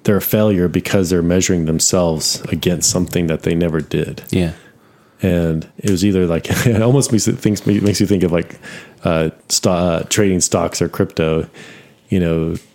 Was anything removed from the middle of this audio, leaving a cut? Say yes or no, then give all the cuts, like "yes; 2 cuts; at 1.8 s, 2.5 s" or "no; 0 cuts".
yes; 2 cuts; at 5.7 s, 9.4 s